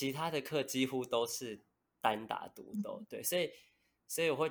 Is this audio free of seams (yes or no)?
yes